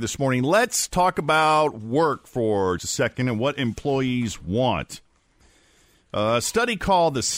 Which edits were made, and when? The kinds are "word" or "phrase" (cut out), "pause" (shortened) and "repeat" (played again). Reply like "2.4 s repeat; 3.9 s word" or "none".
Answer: 2.8 s word